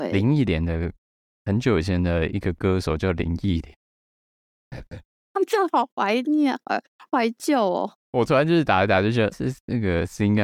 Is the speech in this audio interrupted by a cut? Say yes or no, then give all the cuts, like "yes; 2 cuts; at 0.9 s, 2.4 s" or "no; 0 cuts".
yes; 1 cut; at 9.3 s